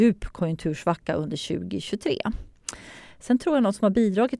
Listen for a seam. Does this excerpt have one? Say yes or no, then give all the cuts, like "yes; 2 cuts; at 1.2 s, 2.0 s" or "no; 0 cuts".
no; 0 cuts